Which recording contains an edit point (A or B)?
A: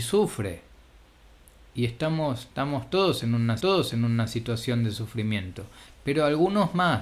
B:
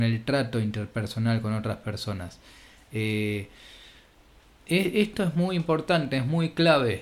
A